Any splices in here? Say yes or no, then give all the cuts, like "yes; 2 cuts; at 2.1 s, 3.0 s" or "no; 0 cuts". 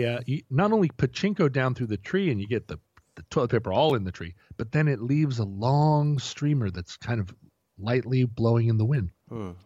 no; 0 cuts